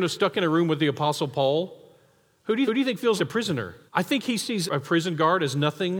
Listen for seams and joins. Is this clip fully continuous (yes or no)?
no